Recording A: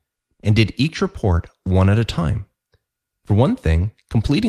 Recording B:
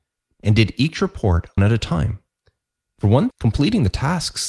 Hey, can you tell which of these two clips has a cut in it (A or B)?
B